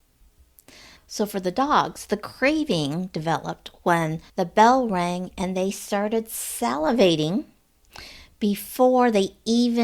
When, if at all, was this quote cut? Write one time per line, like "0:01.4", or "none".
0:04.3